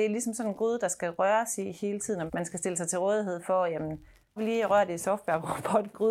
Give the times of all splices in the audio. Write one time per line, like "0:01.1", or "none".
0:02.3
0:04.4